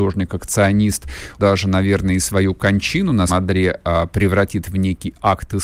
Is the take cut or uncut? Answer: cut